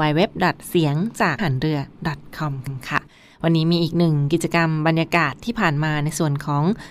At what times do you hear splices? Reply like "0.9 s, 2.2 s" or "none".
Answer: 1.4 s, 2.7 s